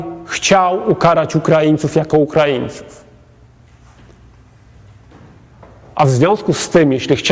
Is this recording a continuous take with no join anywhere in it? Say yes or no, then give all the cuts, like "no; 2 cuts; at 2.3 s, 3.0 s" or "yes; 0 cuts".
yes; 0 cuts